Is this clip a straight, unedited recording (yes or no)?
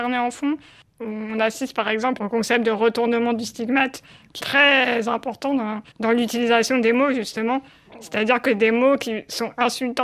no